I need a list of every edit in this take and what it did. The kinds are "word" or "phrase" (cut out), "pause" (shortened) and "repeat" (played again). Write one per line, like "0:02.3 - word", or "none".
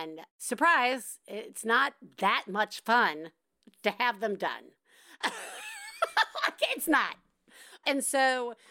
none